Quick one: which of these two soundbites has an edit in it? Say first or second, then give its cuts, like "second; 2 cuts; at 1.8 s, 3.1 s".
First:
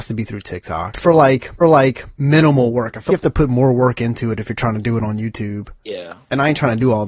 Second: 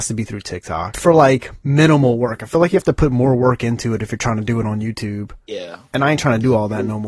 first; 2 cuts; at 1.6 s, 3.1 s